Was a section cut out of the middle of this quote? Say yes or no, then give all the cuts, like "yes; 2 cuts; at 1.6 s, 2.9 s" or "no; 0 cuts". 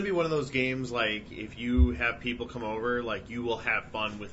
no; 0 cuts